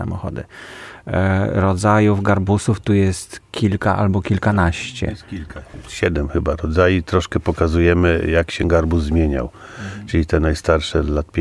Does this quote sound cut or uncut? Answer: uncut